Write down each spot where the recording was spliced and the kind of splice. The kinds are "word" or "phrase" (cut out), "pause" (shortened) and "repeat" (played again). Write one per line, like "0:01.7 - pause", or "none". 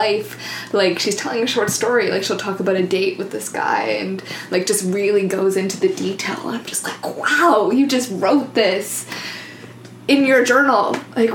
none